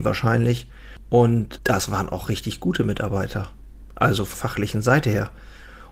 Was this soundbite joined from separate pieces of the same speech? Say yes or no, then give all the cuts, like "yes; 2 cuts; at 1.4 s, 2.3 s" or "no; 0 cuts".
yes; 1 cut; at 4.3 s